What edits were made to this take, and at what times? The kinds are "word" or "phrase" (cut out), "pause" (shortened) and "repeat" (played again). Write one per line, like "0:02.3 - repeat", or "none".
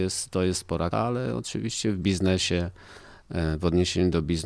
0:00.9 - word